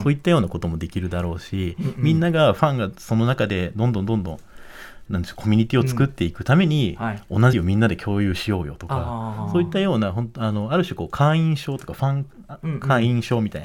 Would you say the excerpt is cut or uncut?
cut